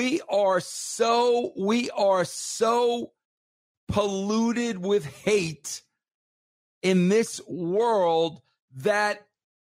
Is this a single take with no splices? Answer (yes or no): yes